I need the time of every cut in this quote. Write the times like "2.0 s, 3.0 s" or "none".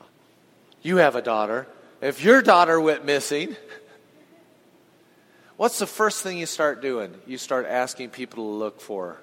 none